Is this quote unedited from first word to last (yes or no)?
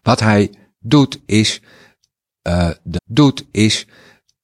no